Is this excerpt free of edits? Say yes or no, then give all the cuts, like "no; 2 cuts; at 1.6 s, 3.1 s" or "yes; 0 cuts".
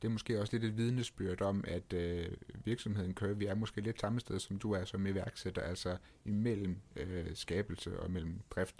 yes; 0 cuts